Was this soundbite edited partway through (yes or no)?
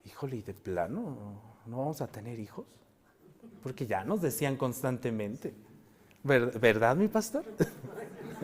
no